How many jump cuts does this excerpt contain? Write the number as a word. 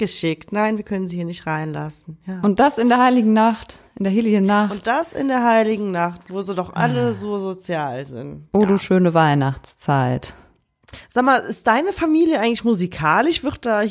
zero